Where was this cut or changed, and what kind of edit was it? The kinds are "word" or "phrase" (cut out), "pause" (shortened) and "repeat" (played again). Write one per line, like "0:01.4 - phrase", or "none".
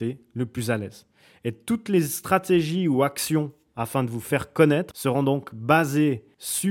none